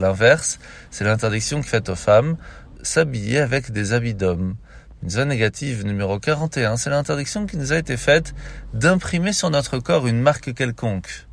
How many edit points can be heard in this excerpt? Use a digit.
2